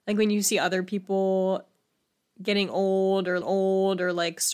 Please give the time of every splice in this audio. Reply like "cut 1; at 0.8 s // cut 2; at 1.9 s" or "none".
cut 1; at 3.4 s